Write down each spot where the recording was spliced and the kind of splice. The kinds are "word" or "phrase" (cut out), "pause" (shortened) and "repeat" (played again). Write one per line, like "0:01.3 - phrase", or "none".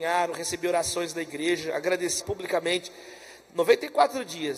0:02.2 - phrase